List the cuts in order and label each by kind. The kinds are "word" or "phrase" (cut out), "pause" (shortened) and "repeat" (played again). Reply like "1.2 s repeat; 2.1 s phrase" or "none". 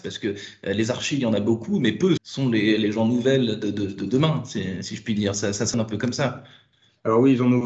2.2 s word; 5.7 s word